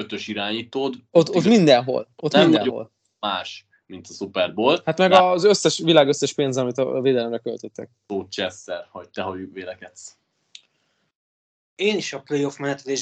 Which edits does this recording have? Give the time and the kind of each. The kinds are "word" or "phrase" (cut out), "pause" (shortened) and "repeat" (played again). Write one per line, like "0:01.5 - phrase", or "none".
none